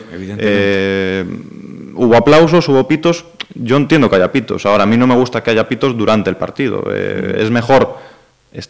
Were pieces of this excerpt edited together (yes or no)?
no